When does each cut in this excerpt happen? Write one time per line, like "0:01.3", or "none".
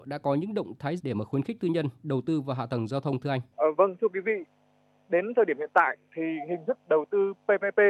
0:01.0
0:03.5
0:06.1